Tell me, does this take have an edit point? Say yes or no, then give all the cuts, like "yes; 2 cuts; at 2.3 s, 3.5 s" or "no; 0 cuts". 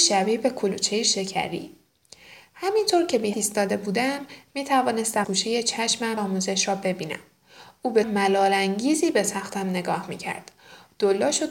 yes; 4 cuts; at 3.3 s, 5.2 s, 6.2 s, 8.0 s